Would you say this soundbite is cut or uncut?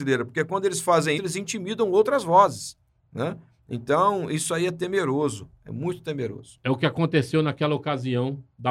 cut